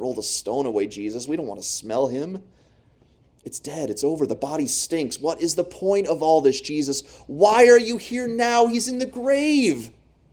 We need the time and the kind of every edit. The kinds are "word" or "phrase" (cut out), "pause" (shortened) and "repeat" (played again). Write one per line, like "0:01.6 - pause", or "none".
none